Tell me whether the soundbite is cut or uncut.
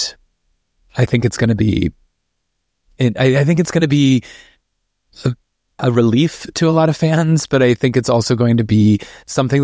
uncut